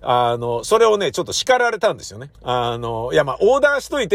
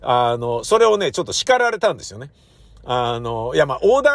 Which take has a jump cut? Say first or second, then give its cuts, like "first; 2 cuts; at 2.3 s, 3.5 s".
first; 1 cut; at 2.3 s